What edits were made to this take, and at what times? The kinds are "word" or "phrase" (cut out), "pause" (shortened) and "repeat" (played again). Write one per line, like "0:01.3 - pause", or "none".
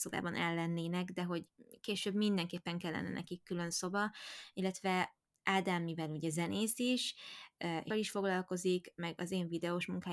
0:07.9 - word